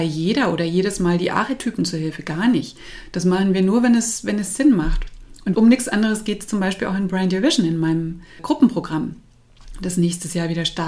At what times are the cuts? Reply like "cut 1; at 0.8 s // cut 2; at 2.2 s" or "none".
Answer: cut 1; at 5.5 s // cut 2; at 8.4 s